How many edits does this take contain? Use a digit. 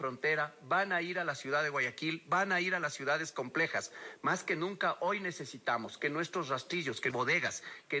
1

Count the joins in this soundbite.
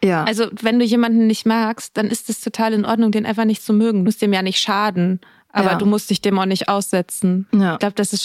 0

